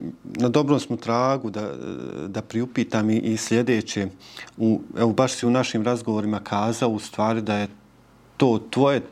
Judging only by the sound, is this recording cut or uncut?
uncut